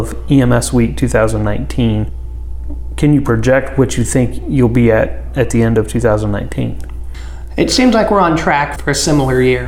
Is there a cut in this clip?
yes; 1 cut; at 8.8 s

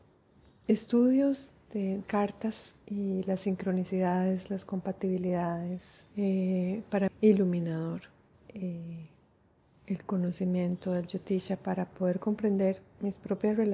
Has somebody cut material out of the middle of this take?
yes; 5 cuts; at 2.0 s, 2.8 s, 6.1 s, 7.1 s, 8.3 s

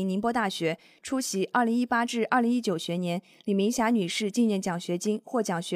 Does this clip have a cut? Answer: no; 0 cuts

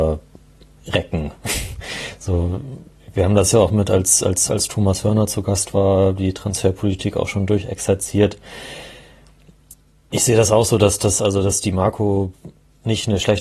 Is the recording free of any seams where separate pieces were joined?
yes; 0 cuts

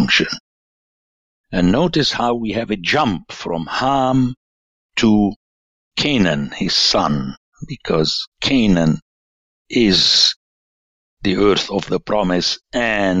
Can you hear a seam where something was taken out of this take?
no; 0 cuts

